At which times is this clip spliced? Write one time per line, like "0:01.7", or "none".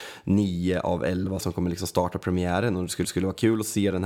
0:01.4
0:03.0